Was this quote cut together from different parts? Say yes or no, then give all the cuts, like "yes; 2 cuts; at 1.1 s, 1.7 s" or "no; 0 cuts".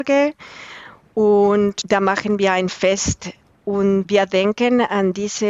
no; 0 cuts